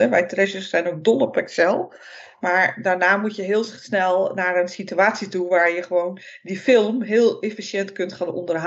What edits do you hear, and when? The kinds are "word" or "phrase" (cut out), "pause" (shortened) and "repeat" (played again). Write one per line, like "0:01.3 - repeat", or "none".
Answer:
none